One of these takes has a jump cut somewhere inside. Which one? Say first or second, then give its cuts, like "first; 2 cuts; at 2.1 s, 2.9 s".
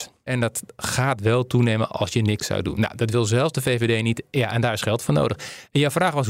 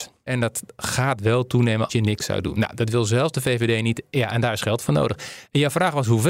second; 1 cut; at 1.9 s